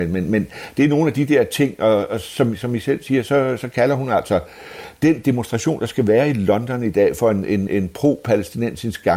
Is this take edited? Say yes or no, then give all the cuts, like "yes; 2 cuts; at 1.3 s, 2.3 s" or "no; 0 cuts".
yes; 1 cut; at 7.7 s